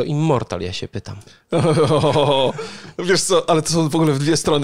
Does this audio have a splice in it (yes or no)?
no